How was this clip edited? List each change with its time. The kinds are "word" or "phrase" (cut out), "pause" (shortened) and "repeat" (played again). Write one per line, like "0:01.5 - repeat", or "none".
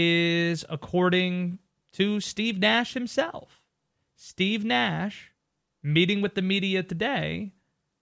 none